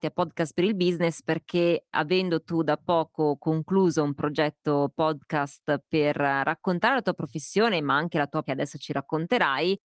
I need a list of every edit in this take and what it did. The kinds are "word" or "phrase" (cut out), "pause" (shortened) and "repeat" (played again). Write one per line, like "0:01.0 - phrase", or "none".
0:08.5 - word